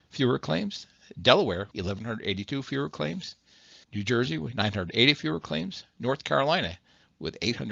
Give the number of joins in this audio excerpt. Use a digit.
2